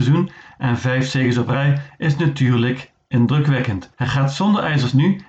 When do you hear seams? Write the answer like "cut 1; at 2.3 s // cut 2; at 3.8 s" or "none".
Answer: cut 1; at 3.9 s